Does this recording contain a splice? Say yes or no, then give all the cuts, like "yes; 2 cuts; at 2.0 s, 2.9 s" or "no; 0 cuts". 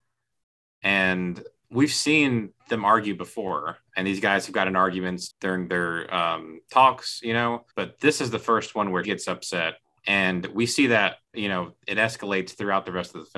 yes; 8 cuts; at 1.6 s, 2.6 s, 3.9 s, 5.3 s, 7.7 s, 9.0 s, 9.8 s, 11.2 s